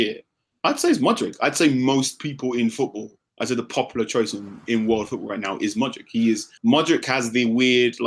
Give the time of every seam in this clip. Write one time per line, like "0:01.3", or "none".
0:06.6